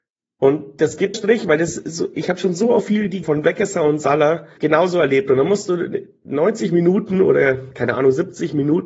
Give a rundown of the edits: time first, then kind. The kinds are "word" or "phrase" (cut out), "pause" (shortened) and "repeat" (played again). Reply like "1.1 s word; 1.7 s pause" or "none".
1.1 s phrase; 3.2 s word; 4.6 s word

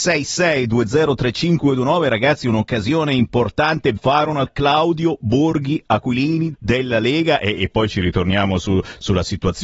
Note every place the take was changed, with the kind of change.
4.0 s word; 4.5 s word; 6.5 s word

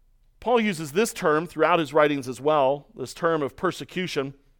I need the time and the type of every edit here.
none

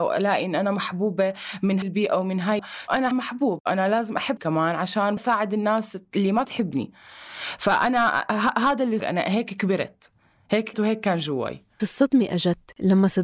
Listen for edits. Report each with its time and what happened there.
1.8 s word; 2.6 s word; 3.1 s word; 4.4 s word; 5.2 s word; 6.4 s word; 9.0 s word; 10.7 s word; 11.8 s word

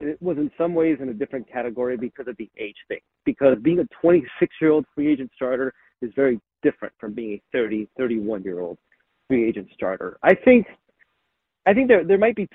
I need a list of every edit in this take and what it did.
none

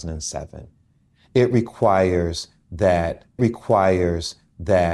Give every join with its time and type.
3.4 s repeat

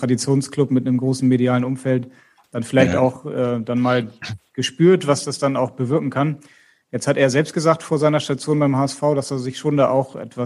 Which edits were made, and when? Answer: none

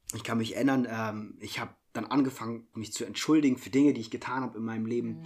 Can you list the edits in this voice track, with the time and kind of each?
1.8 s pause; 2.7 s word

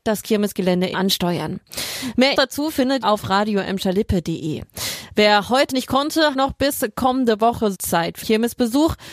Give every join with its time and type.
0.9 s word; 2.3 s word; 3.0 s word; 5.7 s word; 6.3 s word; 7.7 s word; 8.2 s word

